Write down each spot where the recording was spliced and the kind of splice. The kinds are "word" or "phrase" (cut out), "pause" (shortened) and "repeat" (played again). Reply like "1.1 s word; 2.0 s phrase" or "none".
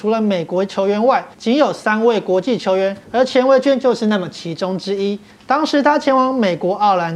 1.3 s pause; 3.0 s pause; 5.3 s pause